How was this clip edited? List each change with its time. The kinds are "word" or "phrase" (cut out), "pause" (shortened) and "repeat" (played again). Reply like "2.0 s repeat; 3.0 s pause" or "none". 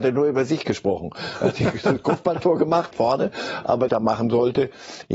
2.9 s word; 3.9 s phrase